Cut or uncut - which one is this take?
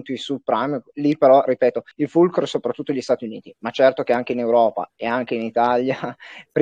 cut